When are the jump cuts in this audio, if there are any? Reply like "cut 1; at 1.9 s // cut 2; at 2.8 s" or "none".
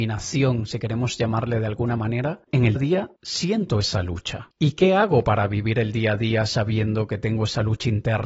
cut 1; at 2.8 s

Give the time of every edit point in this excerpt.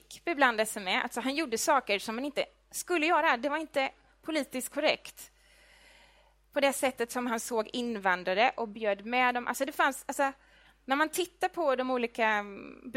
none

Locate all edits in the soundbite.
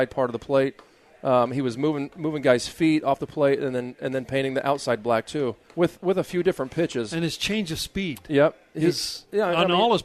cut 1; at 5.6 s

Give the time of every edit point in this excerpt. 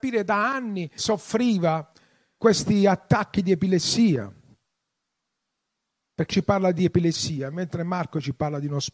cut 1; at 1.0 s // cut 2; at 2.4 s // cut 3; at 6.3 s

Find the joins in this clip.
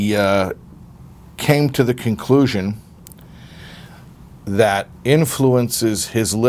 cut 1; at 4.9 s

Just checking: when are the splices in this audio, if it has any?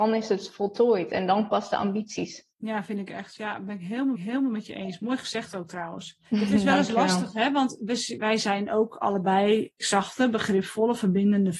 cut 1; at 1.5 s // cut 2; at 2.5 s // cut 3; at 4.1 s // cut 4; at 6.3 s // cut 5; at 8.2 s // cut 6; at 9.8 s

